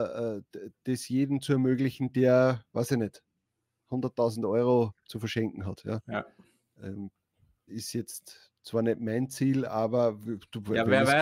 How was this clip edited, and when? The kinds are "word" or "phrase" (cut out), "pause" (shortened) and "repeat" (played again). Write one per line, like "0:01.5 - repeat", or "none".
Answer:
0:07.7 - word